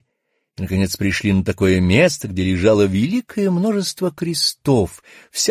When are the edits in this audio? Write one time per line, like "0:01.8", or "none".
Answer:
none